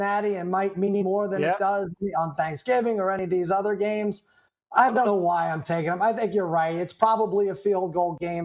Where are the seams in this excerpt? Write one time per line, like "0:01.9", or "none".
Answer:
none